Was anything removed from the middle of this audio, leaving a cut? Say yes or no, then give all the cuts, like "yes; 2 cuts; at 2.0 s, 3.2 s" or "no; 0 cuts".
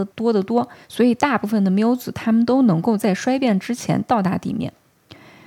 no; 0 cuts